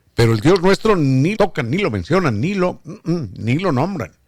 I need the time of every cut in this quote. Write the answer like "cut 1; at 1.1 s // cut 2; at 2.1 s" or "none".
cut 1; at 1.3 s